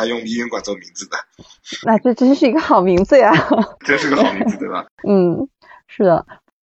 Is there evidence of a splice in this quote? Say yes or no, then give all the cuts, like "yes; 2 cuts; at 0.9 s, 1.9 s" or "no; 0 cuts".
yes; 3 cuts; at 1.8 s, 3.8 s, 4.9 s